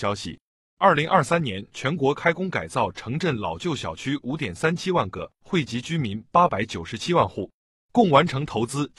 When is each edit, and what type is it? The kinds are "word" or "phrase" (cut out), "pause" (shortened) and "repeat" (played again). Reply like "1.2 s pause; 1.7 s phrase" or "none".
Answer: none